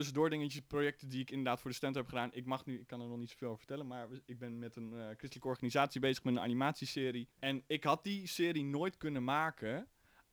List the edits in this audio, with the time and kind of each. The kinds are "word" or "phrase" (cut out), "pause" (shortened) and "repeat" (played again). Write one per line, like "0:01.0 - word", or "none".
0:07.3 - pause